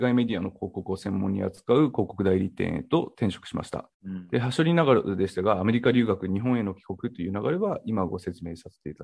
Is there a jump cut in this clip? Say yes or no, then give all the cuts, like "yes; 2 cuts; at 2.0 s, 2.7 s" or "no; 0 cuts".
yes; 1 cut; at 3.9 s